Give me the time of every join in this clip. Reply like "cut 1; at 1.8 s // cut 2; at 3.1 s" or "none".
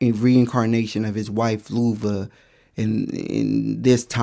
none